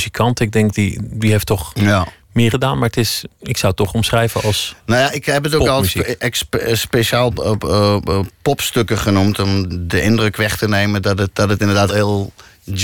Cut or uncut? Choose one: cut